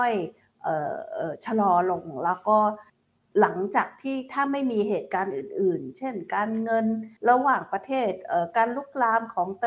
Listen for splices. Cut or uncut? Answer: cut